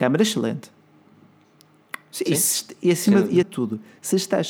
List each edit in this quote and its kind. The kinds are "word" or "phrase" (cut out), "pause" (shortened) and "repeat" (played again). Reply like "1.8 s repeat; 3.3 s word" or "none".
3.4 s word